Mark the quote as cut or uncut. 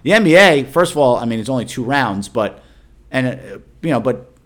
uncut